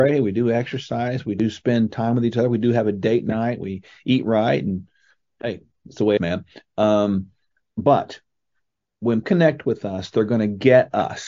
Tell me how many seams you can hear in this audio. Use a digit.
2